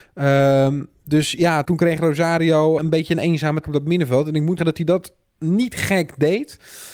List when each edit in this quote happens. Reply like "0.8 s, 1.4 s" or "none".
1.6 s, 2.8 s, 3.6 s, 4.6 s